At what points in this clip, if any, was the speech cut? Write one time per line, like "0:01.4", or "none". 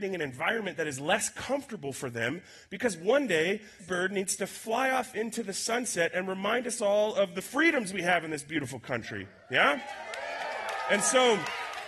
0:03.8